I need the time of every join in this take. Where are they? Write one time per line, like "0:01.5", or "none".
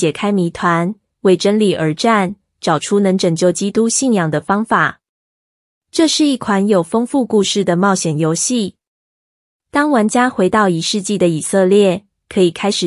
none